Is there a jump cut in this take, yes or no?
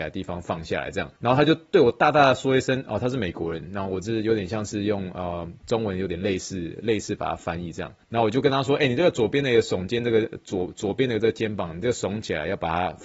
yes